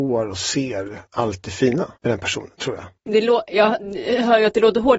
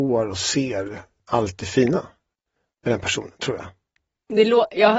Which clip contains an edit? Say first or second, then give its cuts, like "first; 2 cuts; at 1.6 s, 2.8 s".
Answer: first; 3 cuts; at 1.1 s, 2.0 s, 3.0 s